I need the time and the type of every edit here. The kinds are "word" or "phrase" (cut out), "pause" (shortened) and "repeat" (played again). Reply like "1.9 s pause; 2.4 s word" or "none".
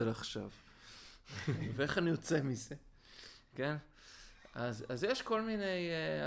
none